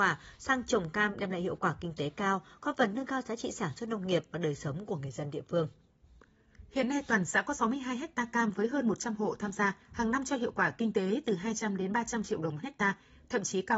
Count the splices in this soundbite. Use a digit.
1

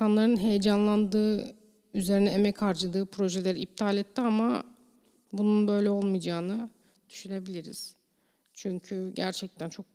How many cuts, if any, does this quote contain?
0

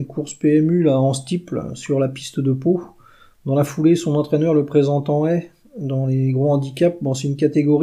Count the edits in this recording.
0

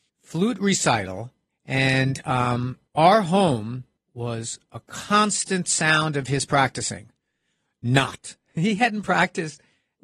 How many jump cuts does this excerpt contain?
0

